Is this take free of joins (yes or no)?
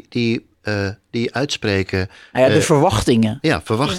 yes